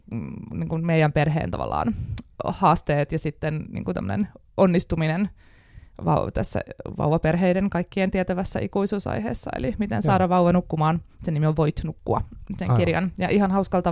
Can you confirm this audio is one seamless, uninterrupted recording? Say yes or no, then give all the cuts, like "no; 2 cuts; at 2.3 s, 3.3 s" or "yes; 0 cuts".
yes; 0 cuts